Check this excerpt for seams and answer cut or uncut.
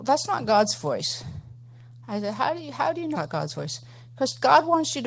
cut